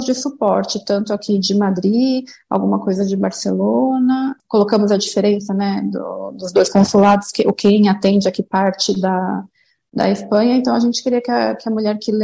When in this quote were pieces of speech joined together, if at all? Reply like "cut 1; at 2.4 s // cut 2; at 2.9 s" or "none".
none

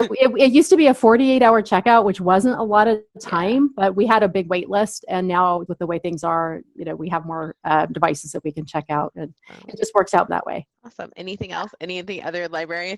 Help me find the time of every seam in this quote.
cut 1; at 5.7 s // cut 2; at 10.3 s // cut 3; at 10.8 s

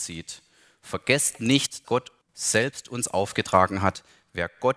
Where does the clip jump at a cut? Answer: cut 1; at 1.8 s // cut 2; at 2.2 s

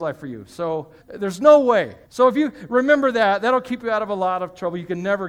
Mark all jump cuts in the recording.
cut 1; at 1.0 s // cut 2; at 2.1 s

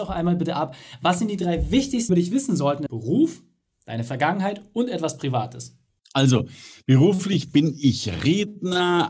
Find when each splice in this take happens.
cut 1; at 2.1 s // cut 2; at 2.9 s

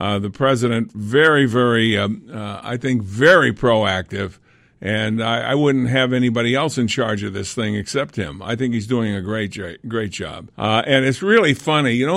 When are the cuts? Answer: cut 1; at 10.5 s

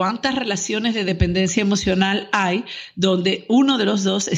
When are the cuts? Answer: none

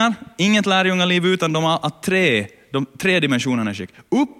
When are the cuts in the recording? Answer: none

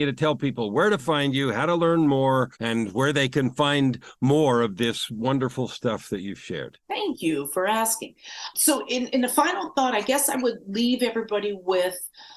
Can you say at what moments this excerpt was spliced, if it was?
cut 1; at 2.5 s // cut 2; at 6.8 s // cut 3; at 8.5 s

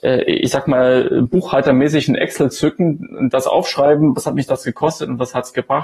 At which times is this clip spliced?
none

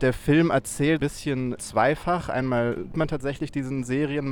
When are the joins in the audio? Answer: cut 1; at 1.0 s // cut 2; at 1.6 s // cut 3; at 2.9 s

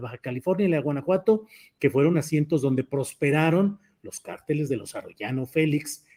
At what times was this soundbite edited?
none

